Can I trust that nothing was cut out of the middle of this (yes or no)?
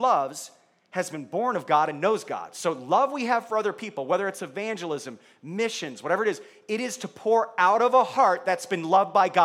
yes